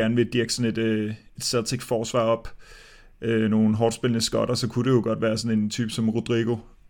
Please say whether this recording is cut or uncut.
uncut